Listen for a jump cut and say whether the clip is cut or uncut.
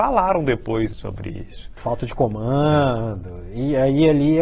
cut